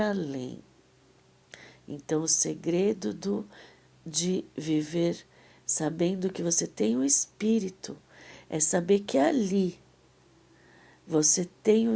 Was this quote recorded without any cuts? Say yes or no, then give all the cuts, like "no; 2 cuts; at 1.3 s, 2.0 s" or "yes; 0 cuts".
yes; 0 cuts